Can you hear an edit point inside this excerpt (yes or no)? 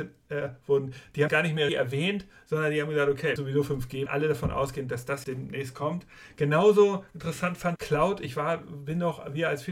yes